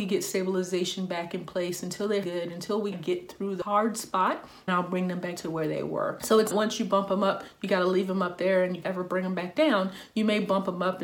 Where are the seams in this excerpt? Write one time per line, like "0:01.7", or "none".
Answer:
0:02.2
0:02.9
0:04.7
0:05.4
0:06.5
0:08.8